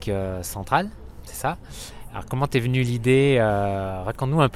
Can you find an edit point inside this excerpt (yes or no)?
no